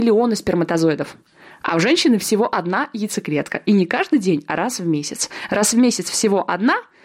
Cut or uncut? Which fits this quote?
uncut